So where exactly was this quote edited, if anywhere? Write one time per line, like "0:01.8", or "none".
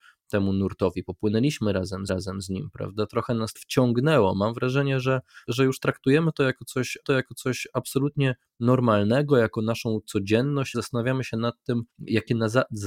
0:02.1
0:03.6
0:05.5
0:07.0
0:10.7
0:11.9

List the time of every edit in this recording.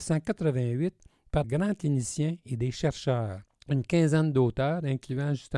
0:01.4
0:03.5

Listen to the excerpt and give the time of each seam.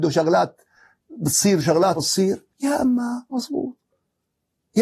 0:02.0
0:02.5
0:03.3

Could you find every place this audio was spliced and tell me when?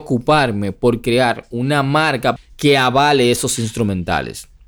0:02.4

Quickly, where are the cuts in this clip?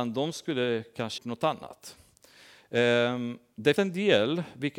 0:01.2
0:03.8

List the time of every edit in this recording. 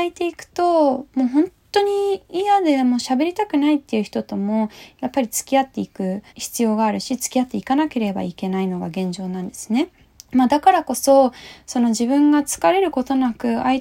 0:06.3
0:10.1

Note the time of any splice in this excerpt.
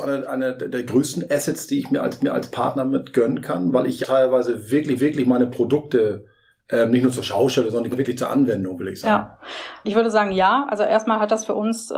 0:02.2
0:04.0
0:05.0
0:07.9

